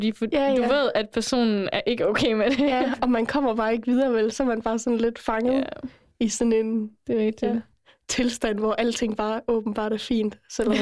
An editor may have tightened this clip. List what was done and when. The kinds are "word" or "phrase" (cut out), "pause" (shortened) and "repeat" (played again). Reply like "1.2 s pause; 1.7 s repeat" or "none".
none

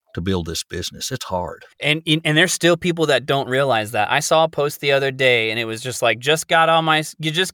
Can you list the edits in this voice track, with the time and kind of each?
1.7 s pause

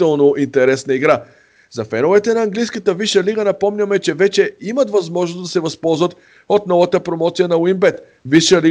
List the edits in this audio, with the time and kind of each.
none

